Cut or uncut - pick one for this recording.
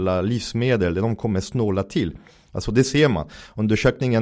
uncut